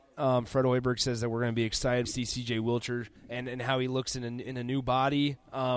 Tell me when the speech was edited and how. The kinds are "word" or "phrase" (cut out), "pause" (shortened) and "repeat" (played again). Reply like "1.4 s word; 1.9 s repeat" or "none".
2.0 s phrase; 3.2 s pause